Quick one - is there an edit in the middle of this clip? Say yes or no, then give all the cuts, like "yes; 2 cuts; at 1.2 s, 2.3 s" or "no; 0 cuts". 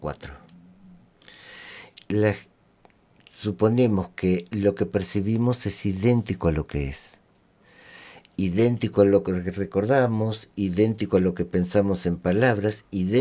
no; 0 cuts